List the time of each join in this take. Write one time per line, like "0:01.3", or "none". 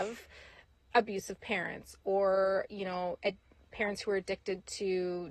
none